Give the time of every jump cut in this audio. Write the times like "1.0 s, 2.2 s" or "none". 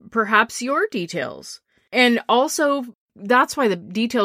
none